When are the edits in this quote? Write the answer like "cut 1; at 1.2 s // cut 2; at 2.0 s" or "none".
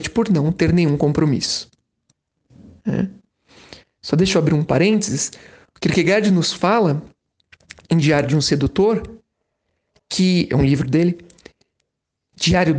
none